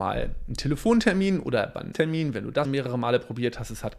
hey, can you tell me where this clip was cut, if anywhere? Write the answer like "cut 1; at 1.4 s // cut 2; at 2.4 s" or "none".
cut 1; at 1.9 s // cut 2; at 2.6 s

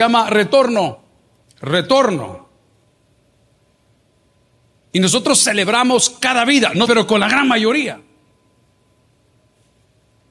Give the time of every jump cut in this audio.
cut 1; at 1.4 s // cut 2; at 6.9 s

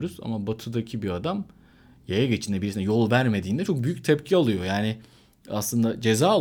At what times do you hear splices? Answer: none

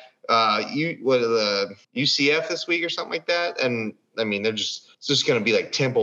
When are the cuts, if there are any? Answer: cut 1; at 1.8 s // cut 2; at 4.9 s

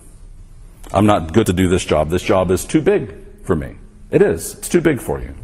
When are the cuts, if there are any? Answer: cut 1; at 1.4 s

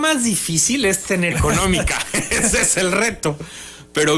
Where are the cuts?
cut 1; at 1.3 s

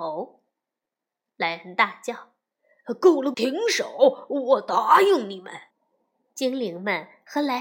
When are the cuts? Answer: cut 1; at 3.3 s // cut 2; at 5.7 s

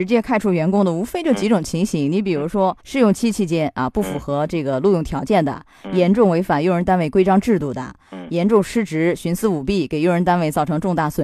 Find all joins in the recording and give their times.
cut 1; at 2.8 s

